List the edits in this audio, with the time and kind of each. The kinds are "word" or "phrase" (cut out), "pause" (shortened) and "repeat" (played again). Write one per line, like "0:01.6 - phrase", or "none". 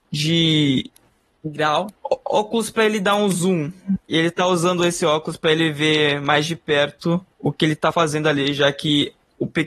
0:02.0 - pause
0:04.0 - pause
0:07.3 - pause